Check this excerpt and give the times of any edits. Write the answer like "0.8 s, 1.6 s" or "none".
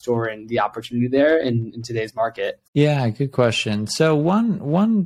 2.7 s